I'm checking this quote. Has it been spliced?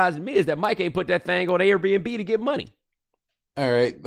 no; 0 cuts

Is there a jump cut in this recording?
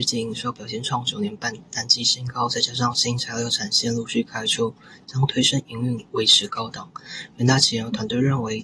no; 0 cuts

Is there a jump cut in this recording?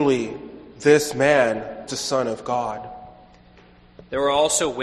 yes; 1 cut; at 1.9 s

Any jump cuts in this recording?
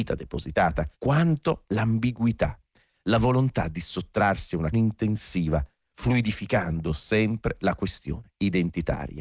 yes; 3 cuts; at 0.9 s, 4.7 s, 6.9 s

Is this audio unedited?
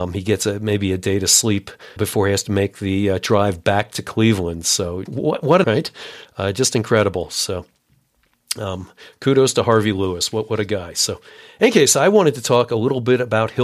no; 3 cuts; at 2.0 s, 5.1 s, 5.6 s

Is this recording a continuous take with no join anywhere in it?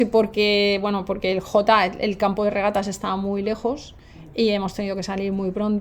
yes; 0 cuts

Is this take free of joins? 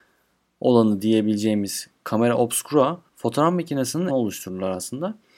no; 3 cuts; at 1.9 s, 3.1 s, 4.1 s

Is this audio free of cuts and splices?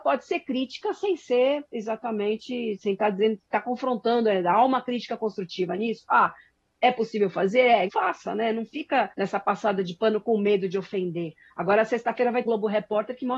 no; 3 cuts; at 7.9 s, 9.1 s, 12.5 s

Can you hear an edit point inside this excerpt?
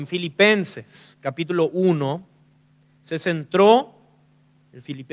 no; 0 cuts

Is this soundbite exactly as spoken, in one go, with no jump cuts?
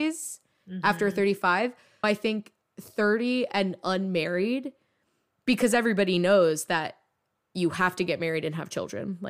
no; 1 cut; at 2.0 s

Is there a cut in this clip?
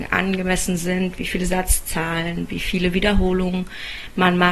no; 0 cuts

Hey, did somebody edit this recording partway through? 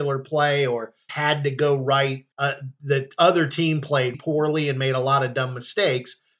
yes; 3 cuts; at 1.1 s, 2.3 s, 4.1 s

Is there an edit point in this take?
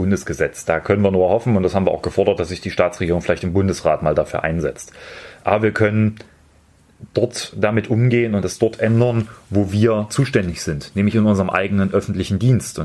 no; 0 cuts

